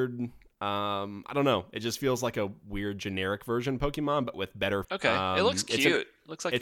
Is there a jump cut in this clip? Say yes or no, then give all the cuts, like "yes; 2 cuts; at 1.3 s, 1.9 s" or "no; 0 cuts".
yes; 1 cut; at 4.8 s